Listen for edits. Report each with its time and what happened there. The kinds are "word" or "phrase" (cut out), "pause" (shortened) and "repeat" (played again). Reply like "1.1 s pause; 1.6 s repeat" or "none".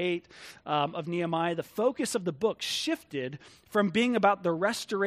none